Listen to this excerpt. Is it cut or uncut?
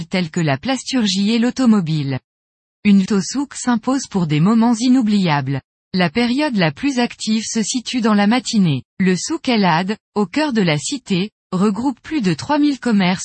cut